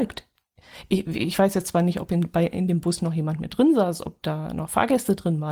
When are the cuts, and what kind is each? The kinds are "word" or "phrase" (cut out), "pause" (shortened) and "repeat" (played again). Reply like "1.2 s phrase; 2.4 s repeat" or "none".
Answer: none